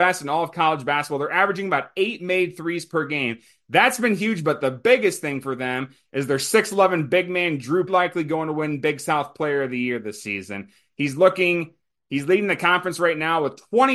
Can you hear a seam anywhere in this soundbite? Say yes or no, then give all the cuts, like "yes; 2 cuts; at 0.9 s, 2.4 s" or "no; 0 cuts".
yes; 1 cut; at 7.9 s